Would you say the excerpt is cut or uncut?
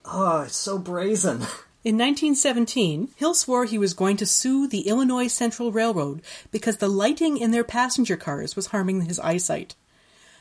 cut